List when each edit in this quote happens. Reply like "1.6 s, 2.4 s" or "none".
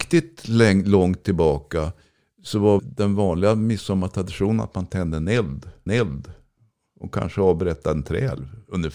2.8 s, 5.9 s